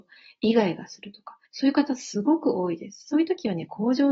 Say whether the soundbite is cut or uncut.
cut